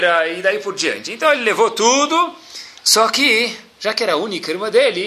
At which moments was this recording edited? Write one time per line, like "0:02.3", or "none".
0:02.8

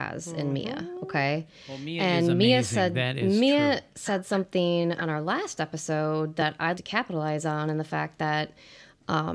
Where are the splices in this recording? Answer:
0:06.7

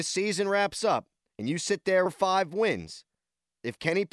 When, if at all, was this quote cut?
0:02.1

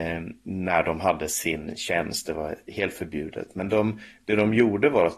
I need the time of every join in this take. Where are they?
none

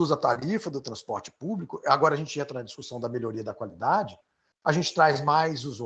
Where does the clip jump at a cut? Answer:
none

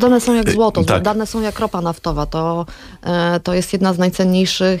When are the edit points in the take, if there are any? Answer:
none

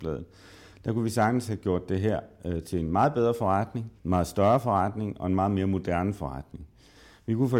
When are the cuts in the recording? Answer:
0:04.0

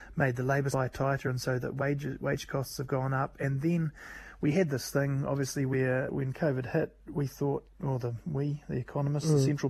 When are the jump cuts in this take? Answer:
0:06.1

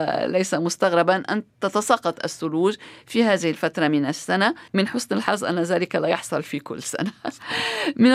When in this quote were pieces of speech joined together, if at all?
0:01.5
0:04.7

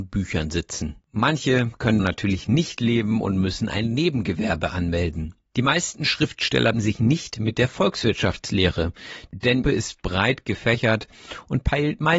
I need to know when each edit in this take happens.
0:01.0
0:02.0
0:06.7
0:09.6

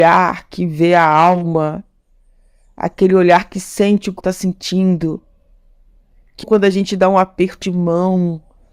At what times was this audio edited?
0:04.2
0:06.4
0:07.6

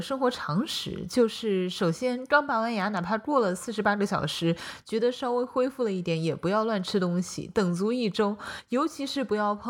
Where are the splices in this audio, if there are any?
none

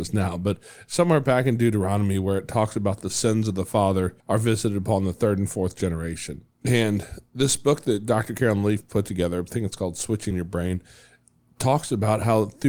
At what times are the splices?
0:04.2
0:06.5
0:10.3

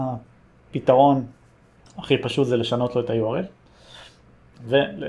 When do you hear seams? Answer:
none

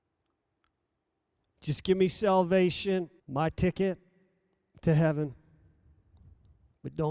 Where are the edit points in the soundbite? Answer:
0:03.2

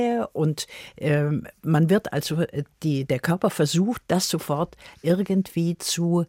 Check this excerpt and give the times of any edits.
none

